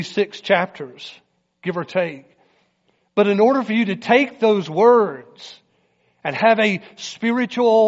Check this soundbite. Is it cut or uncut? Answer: uncut